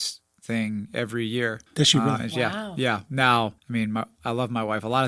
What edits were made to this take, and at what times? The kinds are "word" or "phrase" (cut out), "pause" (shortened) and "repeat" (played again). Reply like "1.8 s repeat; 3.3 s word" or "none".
1.7 s pause; 3.6 s pause